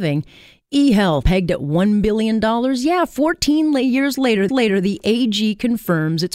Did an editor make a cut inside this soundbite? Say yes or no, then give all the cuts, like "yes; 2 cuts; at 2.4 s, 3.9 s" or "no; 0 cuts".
yes; 2 cuts; at 1.2 s, 4.5 s